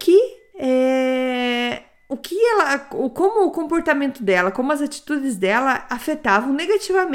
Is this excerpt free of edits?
yes; 0 cuts

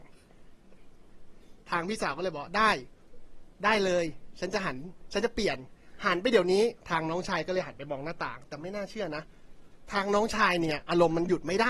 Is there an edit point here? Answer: yes; 1 cut; at 6.8 s

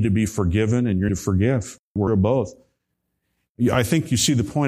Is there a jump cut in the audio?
yes; 2 cuts; at 1.1 s, 2.1 s

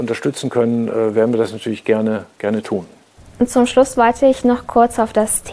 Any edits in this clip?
no; 0 cuts

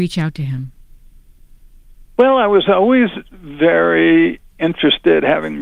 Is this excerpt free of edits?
yes; 0 cuts

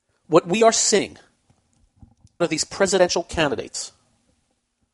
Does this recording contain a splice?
yes; 1 cut; at 2.4 s

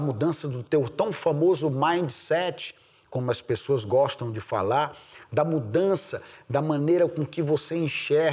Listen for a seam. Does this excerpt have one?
no; 0 cuts

